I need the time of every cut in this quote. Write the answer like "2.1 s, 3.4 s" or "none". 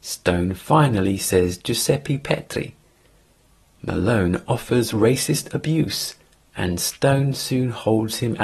none